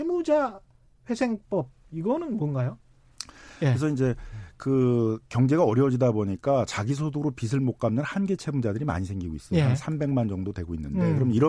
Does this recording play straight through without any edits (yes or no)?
yes